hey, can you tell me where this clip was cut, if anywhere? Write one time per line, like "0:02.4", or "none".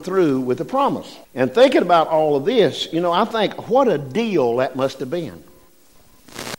0:01.2